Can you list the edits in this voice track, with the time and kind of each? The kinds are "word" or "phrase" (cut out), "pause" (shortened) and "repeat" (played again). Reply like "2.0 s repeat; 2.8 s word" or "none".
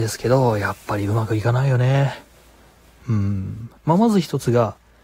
3.8 s pause